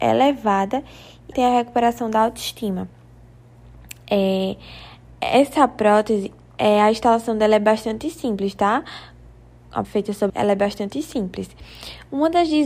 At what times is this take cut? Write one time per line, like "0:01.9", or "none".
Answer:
0:01.3
0:05.1
0:09.8
0:10.3

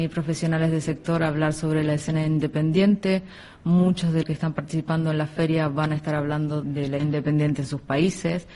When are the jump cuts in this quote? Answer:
0:04.2
0:06.6
0:07.0

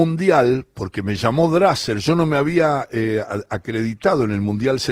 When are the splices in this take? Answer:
none

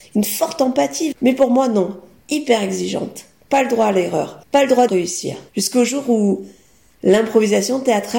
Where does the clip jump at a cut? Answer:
0:01.1
0:04.4
0:04.9
0:05.5

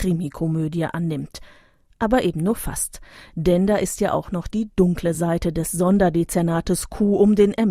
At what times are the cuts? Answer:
none

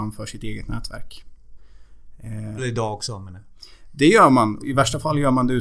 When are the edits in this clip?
0:02.6
0:04.6

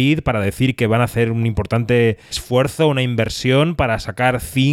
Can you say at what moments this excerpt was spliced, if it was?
0:02.3

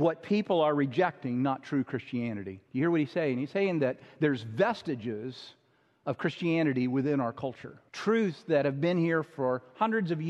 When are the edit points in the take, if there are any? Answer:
0:02.6
0:07.9

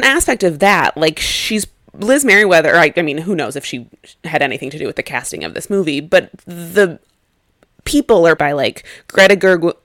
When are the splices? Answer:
0:08.4

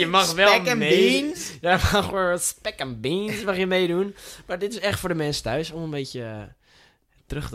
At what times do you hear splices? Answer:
none

